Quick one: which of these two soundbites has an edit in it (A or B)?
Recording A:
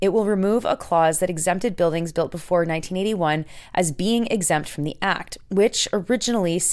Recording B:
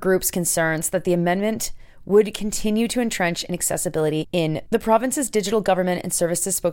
B